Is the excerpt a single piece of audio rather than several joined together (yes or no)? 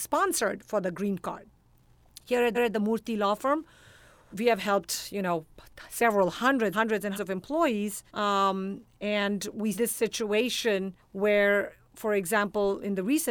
no